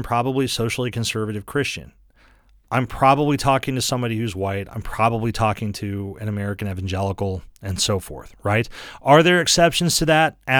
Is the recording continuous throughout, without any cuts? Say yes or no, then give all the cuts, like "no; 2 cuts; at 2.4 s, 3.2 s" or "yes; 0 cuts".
yes; 0 cuts